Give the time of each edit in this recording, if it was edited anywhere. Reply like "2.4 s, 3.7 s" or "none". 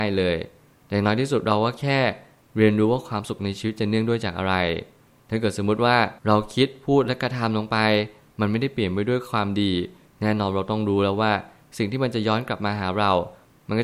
6.2 s